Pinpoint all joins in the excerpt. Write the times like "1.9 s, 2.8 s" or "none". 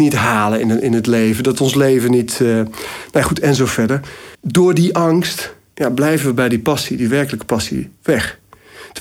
4.3 s, 8.0 s